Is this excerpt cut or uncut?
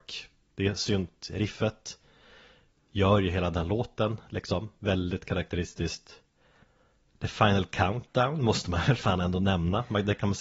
uncut